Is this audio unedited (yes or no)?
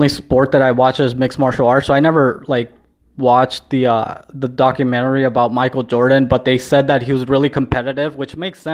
yes